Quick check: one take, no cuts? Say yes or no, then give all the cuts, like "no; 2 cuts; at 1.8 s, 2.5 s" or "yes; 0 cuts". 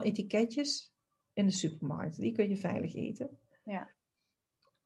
yes; 0 cuts